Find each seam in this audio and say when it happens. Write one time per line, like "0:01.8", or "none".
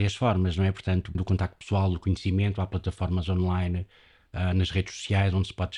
0:01.1